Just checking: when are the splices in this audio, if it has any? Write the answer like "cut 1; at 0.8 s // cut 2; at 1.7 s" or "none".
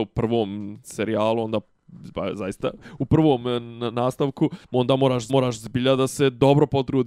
cut 1; at 4.6 s // cut 2; at 5.3 s